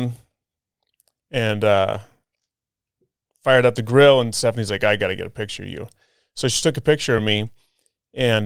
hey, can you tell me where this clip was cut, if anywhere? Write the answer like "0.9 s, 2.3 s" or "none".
none